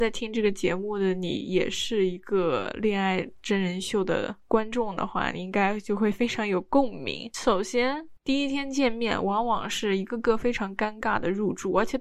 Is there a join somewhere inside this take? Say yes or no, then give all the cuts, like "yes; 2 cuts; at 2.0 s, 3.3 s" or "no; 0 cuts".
yes; 1 cut; at 8.2 s